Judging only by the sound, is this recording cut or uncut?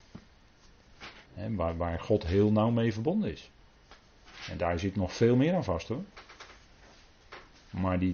cut